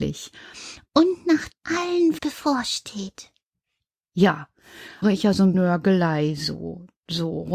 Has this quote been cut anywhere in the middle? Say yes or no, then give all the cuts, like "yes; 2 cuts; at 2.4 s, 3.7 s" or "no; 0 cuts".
yes; 4 cuts; at 1.5 s, 2.2 s, 5.0 s, 5.5 s